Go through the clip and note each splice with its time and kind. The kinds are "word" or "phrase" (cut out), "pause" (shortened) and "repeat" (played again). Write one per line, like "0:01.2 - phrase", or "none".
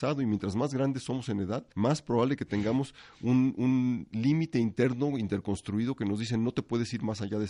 0:01.7 - pause